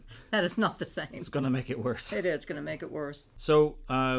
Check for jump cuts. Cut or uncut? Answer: uncut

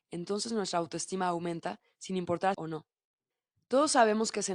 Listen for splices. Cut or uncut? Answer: cut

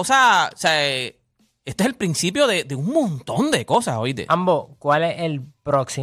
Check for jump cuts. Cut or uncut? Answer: uncut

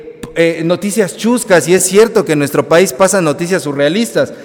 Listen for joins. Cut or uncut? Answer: uncut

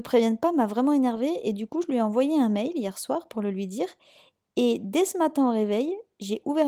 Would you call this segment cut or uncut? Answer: uncut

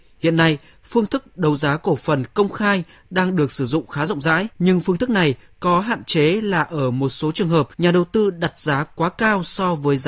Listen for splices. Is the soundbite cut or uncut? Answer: cut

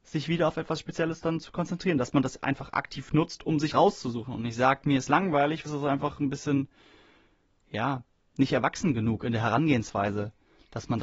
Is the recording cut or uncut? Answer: cut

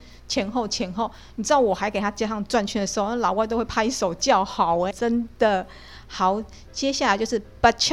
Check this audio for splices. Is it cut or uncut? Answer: cut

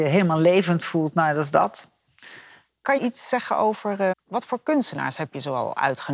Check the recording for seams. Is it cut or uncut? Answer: cut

